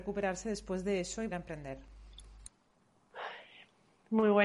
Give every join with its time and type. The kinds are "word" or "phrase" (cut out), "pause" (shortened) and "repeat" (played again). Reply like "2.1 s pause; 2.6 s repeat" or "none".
1.3 s word